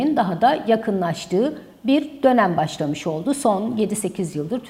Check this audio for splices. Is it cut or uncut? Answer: uncut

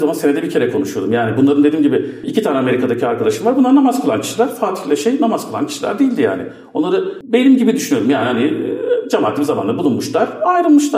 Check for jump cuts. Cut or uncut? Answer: uncut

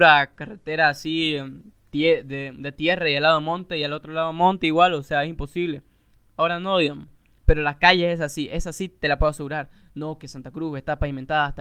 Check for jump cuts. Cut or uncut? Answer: uncut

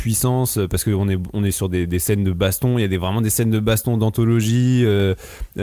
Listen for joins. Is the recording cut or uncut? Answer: uncut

